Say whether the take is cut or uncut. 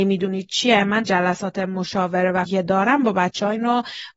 cut